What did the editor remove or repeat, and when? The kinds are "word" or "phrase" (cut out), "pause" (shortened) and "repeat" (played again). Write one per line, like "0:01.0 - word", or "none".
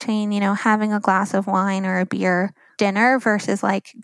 0:02.8 - word

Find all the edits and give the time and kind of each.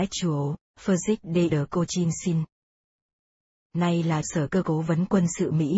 0:01.5 - word
0:04.2 - word
0:04.6 - word

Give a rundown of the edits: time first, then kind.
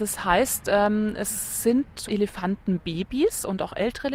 0:02.1 - word

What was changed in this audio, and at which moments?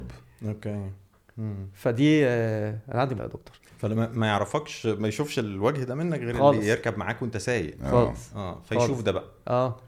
0:03.2 - word
0:03.7 - pause

